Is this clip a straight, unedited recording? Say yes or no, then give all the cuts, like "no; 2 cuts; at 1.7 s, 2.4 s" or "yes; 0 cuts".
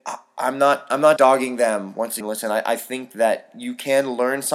no; 2 cuts; at 1.2 s, 2.2 s